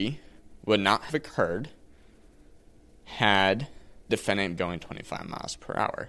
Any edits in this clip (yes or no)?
yes